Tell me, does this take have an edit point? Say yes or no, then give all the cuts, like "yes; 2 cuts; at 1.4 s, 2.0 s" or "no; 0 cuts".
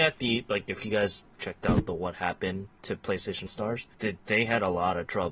yes; 3 cuts; at 1.3 s, 3.5 s, 3.9 s